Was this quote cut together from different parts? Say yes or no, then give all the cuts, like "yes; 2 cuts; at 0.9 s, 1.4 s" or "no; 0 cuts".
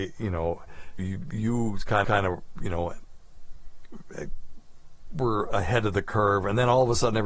yes; 2 cuts; at 1.0 s, 2.0 s